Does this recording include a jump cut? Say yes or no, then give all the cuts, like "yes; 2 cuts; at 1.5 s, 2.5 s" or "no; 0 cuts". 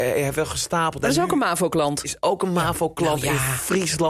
no; 0 cuts